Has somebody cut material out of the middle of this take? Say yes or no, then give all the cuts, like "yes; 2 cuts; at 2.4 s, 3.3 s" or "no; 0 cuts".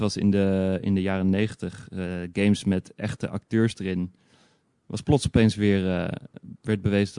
no; 0 cuts